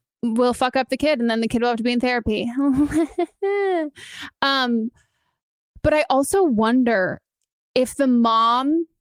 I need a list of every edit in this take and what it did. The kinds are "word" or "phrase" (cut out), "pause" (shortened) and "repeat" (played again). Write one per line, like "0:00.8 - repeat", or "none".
none